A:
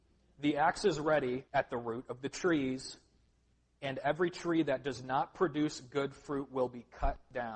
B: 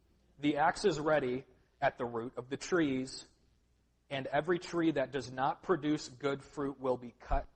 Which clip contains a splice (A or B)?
A